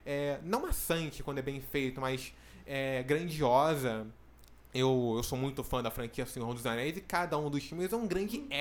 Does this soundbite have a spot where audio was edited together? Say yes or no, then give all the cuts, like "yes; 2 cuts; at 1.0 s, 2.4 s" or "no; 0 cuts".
no; 0 cuts